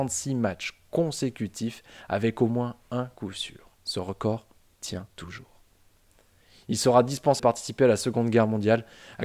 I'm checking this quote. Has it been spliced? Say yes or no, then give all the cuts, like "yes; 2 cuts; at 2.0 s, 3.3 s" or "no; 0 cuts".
yes; 3 cuts; at 3.7 s, 5.1 s, 7.4 s